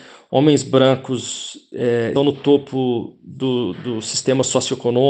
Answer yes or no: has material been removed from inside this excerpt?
yes